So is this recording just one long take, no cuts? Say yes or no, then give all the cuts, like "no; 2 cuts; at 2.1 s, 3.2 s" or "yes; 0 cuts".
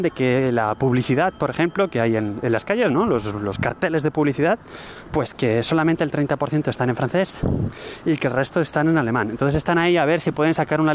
yes; 0 cuts